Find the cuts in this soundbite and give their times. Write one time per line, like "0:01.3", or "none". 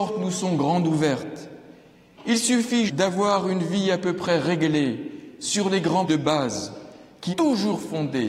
0:02.9
0:06.1
0:07.3